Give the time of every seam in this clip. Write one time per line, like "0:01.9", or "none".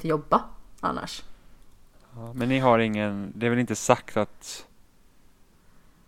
none